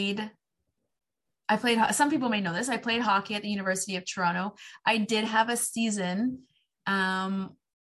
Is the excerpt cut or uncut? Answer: uncut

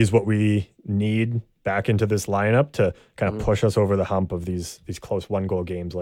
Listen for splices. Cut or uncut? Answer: uncut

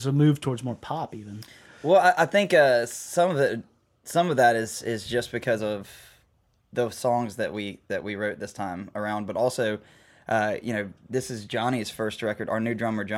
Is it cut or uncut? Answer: uncut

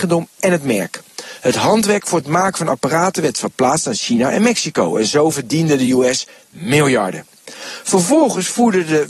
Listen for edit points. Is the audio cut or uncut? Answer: uncut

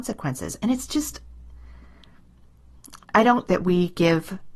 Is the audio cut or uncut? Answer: cut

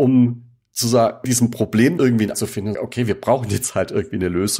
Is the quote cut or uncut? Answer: cut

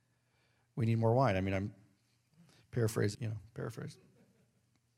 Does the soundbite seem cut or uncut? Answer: cut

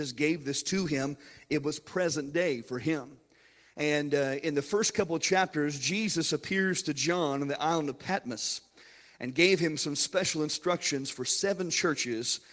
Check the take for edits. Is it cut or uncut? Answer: uncut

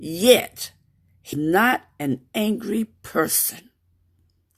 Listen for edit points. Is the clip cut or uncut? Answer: cut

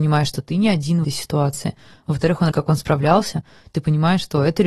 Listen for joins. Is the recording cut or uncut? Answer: cut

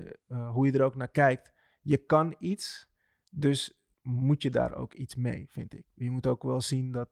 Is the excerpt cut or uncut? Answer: cut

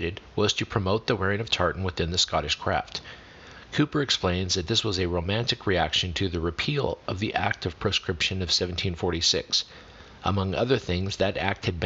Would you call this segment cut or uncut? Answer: uncut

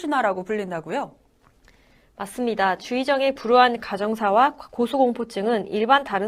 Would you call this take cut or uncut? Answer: uncut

